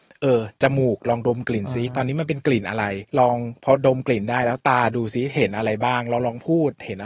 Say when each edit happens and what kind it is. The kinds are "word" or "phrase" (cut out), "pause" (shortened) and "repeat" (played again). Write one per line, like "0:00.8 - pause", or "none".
0:03.1 - pause